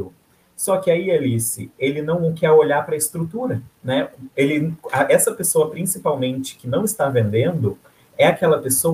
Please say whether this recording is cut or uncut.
uncut